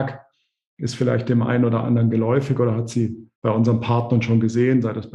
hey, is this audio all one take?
no; 1 cut; at 3.4 s

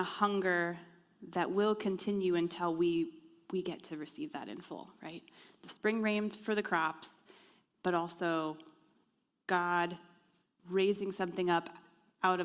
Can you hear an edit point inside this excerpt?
no; 0 cuts

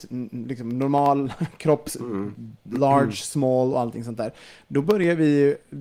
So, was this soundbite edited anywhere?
no; 0 cuts

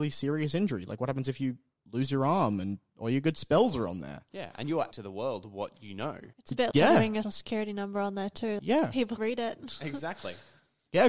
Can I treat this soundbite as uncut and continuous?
no; 7 cuts; at 1.8 s, 4.9 s, 6.3 s, 6.7 s, 7.2 s, 8.6 s, 9.2 s

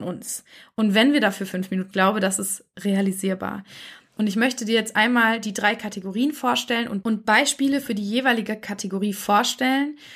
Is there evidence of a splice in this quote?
yes; 1 cut; at 1.9 s

